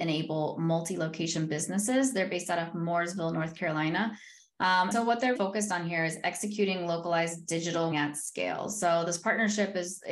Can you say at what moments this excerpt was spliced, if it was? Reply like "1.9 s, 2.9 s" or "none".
4.9 s, 5.3 s, 7.9 s

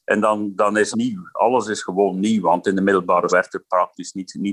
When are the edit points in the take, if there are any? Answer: 0.9 s, 3.3 s

